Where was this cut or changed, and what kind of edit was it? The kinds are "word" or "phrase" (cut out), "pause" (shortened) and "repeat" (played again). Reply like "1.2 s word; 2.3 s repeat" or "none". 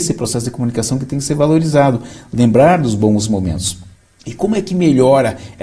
3.9 s pause